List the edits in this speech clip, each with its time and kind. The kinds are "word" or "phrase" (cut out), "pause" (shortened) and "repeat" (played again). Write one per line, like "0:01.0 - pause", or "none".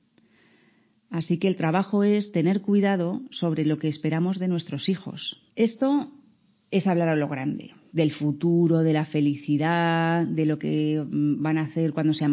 0:05.5 - pause